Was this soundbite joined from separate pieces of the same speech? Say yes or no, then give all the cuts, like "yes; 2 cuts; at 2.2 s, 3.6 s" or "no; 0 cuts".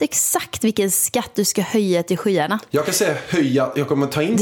no; 0 cuts